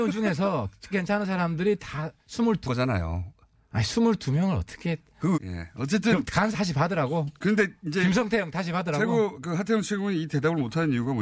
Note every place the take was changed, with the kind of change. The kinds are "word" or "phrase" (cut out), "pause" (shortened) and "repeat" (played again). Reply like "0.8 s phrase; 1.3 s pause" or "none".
0.9 s word; 2.7 s phrase; 5.3 s word; 6.5 s word